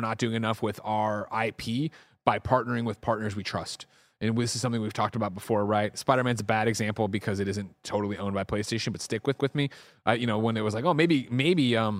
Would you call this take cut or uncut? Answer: cut